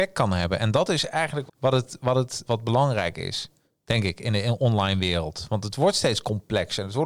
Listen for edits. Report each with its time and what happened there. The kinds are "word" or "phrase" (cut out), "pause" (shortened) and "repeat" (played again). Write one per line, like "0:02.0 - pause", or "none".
0:01.5 - word
0:02.5 - word